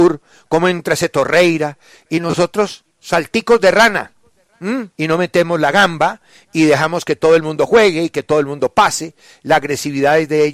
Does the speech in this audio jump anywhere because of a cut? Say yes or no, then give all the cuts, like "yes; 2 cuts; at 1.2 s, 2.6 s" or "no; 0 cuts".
yes; 1 cut; at 4.9 s